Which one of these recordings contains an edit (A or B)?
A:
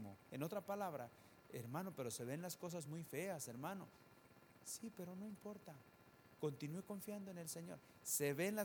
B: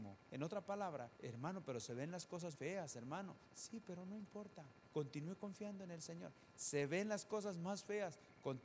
B